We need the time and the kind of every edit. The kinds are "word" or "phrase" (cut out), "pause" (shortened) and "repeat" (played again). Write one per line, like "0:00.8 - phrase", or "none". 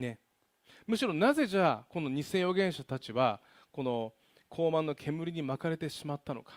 none